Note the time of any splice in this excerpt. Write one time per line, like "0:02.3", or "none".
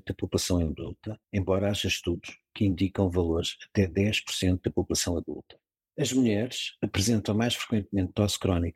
0:01.2

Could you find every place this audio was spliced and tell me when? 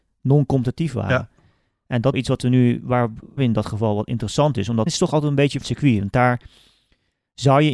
0:02.1
0:03.4
0:04.9
0:05.6

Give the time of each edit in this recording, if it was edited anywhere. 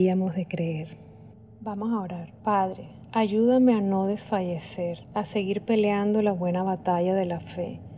0:01.3
0:02.4
0:05.0

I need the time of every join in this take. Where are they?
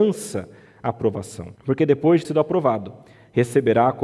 0:01.6
0:02.2

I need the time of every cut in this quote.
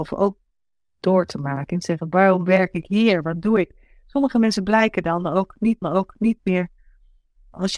0:05.8

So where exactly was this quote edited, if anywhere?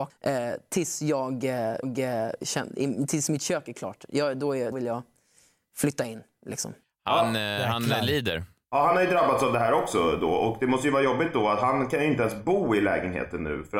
0:01.8
0:04.7

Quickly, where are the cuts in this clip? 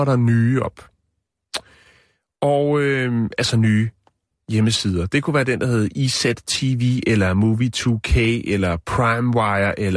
none

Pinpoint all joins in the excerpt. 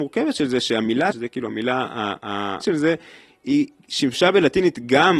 0:01.1
0:02.6

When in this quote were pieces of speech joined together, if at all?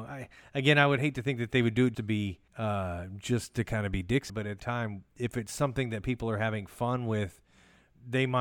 0:01.9
0:02.5
0:04.3
0:04.6
0:05.1

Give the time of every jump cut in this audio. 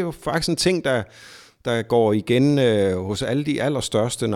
none

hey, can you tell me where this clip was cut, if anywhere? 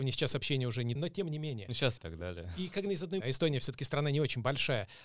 0:01.0
0:02.0
0:02.9
0:03.2

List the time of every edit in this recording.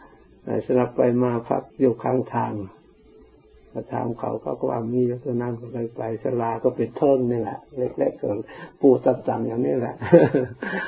0:01.7

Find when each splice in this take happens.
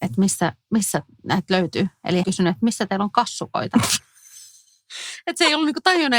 0:02.2

